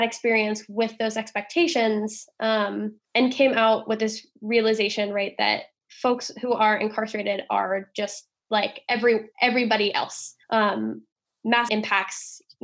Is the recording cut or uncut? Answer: cut